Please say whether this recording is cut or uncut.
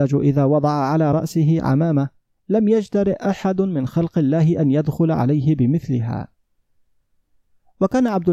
uncut